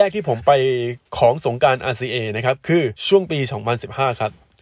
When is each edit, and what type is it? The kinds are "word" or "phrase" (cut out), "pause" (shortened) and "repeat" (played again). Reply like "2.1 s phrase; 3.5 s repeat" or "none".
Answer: 1.1 s pause; 3.0 s pause